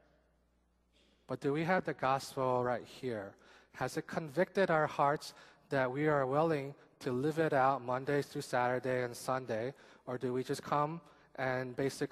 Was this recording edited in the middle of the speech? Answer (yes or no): no